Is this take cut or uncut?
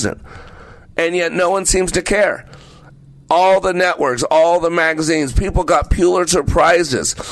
uncut